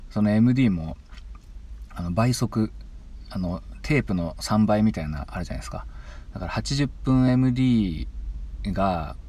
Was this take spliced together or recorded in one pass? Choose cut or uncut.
uncut